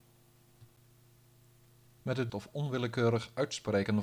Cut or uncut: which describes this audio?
cut